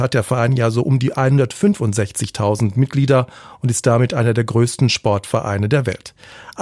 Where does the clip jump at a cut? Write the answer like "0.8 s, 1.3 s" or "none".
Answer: none